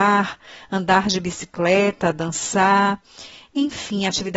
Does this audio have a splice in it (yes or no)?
no